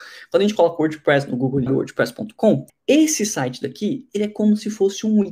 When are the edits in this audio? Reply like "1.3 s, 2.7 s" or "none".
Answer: 1.7 s, 2.7 s